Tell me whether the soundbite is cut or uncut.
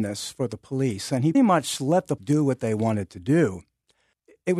cut